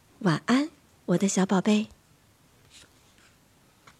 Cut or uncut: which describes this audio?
uncut